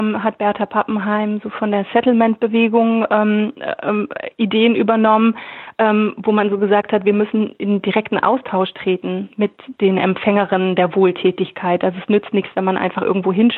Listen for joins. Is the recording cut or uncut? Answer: uncut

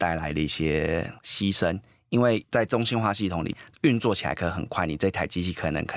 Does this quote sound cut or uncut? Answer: uncut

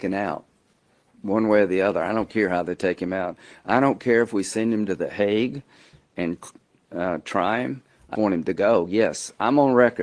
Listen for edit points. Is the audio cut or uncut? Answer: cut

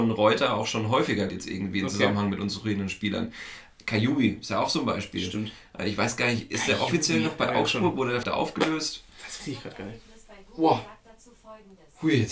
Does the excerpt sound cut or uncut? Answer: cut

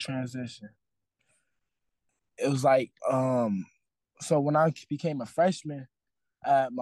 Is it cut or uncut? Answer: cut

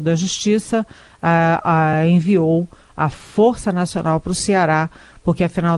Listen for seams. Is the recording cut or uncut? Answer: uncut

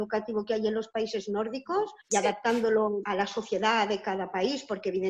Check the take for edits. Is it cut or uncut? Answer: cut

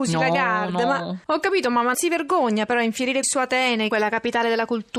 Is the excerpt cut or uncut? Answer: cut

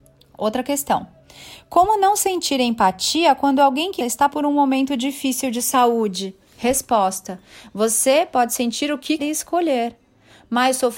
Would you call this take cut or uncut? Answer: cut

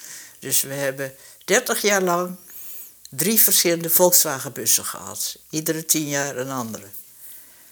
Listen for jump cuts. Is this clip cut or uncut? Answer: cut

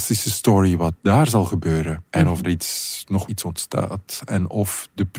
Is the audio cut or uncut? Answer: cut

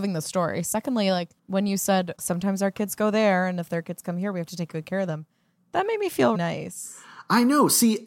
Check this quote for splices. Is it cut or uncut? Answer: cut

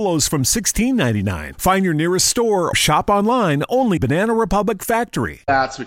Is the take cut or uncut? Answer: cut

